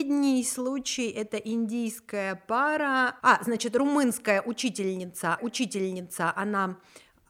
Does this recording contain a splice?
yes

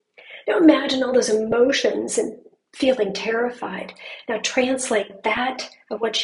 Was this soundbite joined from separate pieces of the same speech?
no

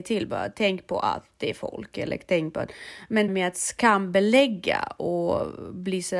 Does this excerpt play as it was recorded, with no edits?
no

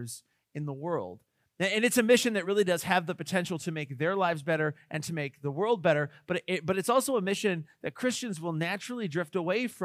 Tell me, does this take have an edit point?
no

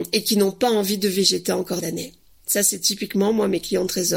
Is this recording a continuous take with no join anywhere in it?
no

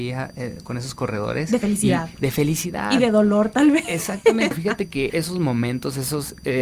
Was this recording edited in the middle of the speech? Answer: yes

